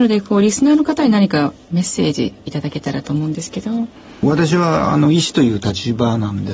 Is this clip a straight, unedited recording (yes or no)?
yes